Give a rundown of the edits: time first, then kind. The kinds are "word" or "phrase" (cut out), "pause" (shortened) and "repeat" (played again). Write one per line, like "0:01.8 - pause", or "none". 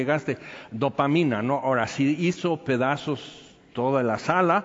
none